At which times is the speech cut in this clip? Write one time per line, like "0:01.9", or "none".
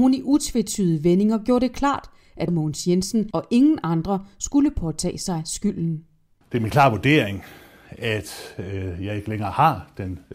none